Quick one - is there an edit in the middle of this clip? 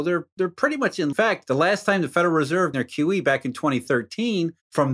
yes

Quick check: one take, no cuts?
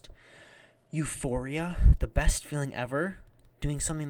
yes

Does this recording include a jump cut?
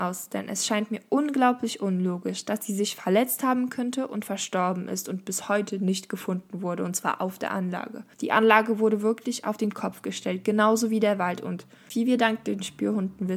yes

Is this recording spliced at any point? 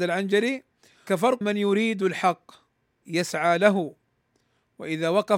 yes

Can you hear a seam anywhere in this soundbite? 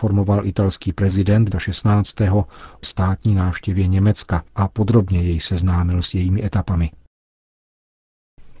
yes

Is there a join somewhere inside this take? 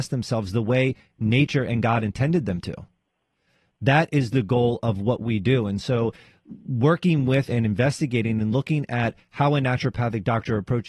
no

